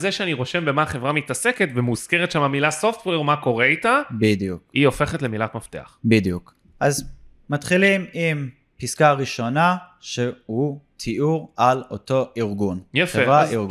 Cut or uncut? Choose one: uncut